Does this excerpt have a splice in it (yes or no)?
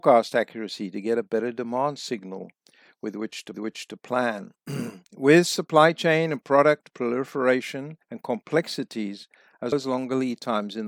yes